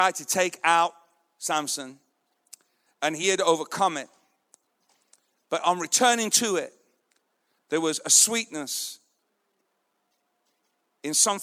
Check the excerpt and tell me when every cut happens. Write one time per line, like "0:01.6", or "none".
none